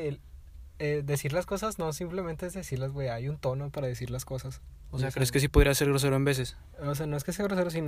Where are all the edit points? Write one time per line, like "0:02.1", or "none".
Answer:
none